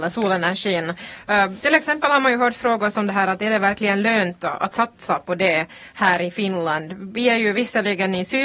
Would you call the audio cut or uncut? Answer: uncut